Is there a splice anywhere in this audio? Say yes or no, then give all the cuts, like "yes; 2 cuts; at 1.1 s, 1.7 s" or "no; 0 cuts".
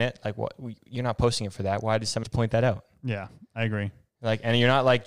yes; 1 cut; at 2.2 s